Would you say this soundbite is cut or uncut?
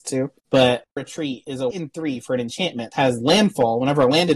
cut